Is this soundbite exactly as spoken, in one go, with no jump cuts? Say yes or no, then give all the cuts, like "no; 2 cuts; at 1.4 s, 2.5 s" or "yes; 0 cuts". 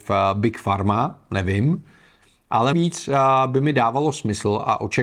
no; 1 cut; at 2.7 s